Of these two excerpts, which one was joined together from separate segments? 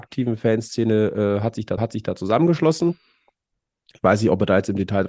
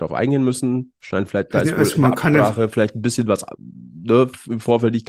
first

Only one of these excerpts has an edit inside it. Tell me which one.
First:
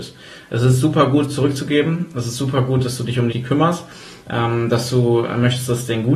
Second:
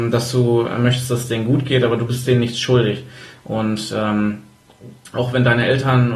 first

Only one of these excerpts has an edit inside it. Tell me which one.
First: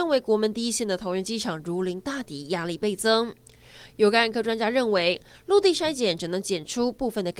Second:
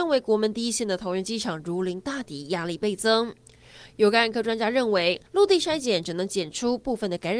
second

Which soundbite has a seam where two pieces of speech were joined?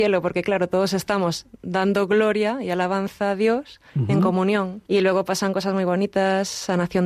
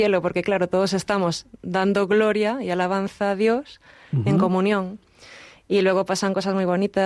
first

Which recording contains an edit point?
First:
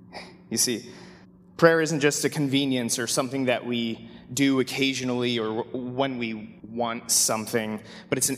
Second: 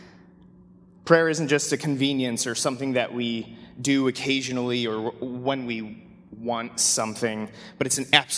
first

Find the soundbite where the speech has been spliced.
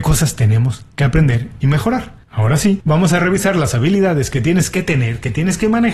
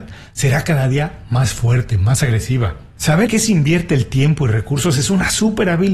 second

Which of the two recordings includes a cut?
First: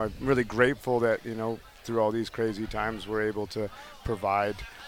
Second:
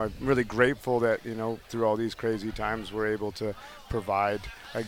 second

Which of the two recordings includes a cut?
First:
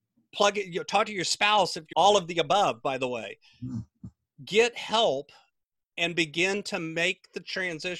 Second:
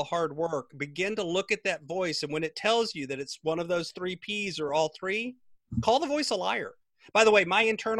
first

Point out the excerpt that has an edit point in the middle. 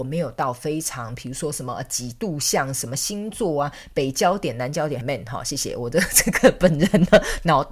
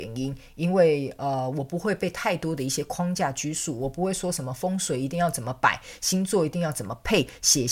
first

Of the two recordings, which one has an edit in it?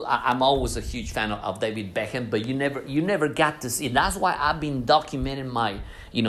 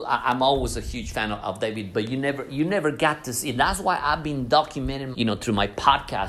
second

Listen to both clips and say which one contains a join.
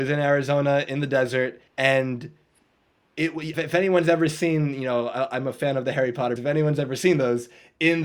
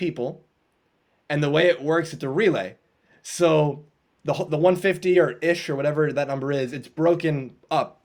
first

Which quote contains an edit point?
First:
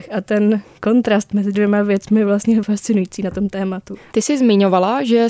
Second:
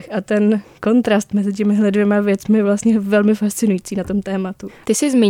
first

